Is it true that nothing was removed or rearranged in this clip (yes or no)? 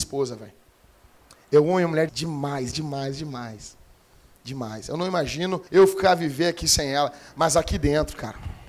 no